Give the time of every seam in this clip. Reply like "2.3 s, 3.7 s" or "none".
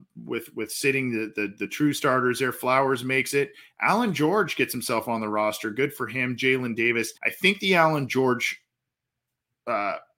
7.2 s